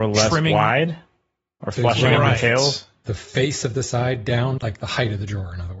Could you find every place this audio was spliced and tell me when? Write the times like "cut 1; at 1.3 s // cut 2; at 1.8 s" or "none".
cut 1; at 4.6 s